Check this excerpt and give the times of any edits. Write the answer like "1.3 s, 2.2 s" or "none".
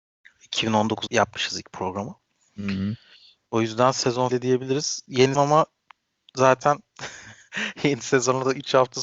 1.1 s, 4.3 s, 5.3 s